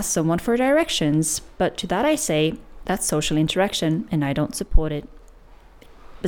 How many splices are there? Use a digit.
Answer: 0